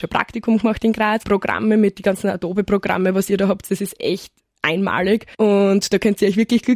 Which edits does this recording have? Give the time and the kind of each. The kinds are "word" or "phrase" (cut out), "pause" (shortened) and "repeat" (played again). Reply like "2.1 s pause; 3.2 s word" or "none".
1.2 s phrase; 5.3 s pause